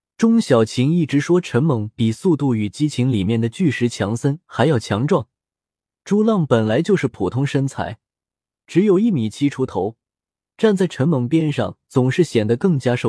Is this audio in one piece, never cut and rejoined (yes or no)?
yes